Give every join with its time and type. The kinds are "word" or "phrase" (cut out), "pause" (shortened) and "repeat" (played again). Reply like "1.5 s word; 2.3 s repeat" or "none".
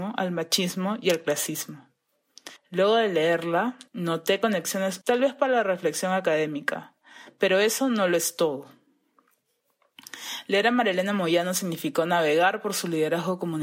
2.6 s pause; 3.9 s pause; 5.0 s word